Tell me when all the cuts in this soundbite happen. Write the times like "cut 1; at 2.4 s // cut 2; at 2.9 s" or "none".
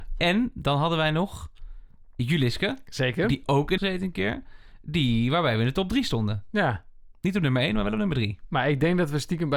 cut 1; at 3.8 s